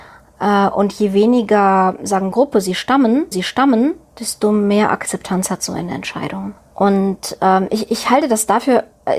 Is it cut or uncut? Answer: cut